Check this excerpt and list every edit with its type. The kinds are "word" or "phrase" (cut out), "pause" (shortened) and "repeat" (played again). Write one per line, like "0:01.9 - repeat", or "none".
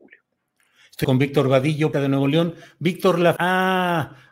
0:01.0 - word
0:01.9 - word
0:03.4 - word